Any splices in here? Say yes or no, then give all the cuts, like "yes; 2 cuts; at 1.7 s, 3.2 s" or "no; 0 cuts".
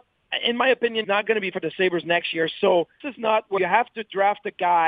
yes; 4 cuts; at 1.0 s, 1.5 s, 3.0 s, 3.6 s